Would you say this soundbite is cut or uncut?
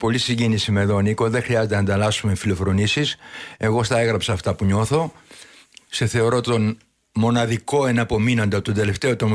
uncut